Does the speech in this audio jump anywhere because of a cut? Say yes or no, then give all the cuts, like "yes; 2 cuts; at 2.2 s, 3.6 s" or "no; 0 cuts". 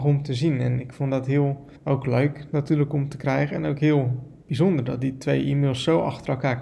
yes; 2 cuts; at 1.7 s, 4.4 s